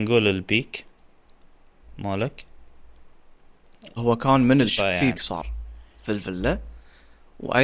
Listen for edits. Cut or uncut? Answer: cut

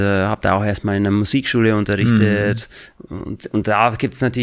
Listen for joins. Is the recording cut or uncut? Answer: uncut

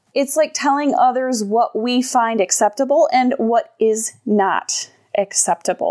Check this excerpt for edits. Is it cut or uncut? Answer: uncut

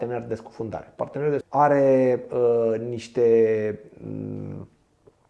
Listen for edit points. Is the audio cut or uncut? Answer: cut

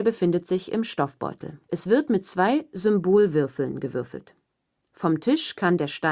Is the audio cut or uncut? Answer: cut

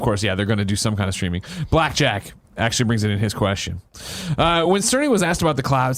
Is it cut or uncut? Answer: uncut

